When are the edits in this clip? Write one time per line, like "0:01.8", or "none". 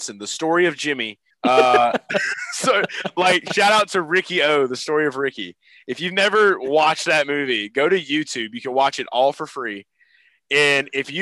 0:01.3